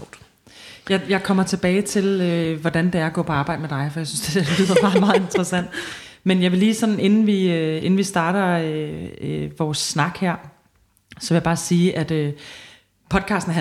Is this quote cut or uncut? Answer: uncut